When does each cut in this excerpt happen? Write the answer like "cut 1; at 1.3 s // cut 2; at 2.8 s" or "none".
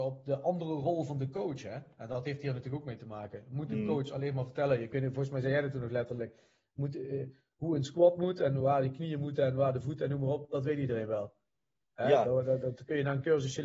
none